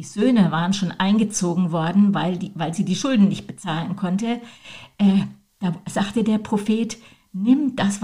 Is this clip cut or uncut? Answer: uncut